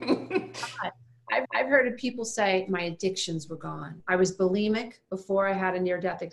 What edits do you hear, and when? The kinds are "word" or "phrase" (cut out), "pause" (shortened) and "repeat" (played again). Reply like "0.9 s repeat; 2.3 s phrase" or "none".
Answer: 1.4 s repeat